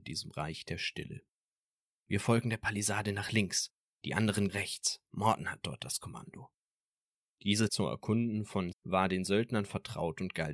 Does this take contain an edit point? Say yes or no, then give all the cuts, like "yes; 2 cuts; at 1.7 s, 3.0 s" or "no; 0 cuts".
yes; 3 cuts; at 4.5 s, 7.7 s, 8.7 s